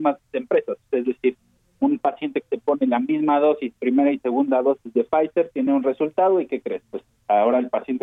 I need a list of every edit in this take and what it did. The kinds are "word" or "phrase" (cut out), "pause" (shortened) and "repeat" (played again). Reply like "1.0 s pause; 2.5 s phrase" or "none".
none